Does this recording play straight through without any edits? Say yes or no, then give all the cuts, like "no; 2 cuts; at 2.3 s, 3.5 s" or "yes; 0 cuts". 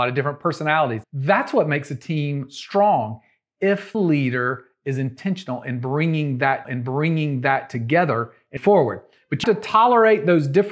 no; 5 cuts; at 1.0 s, 3.9 s, 6.6 s, 8.6 s, 9.4 s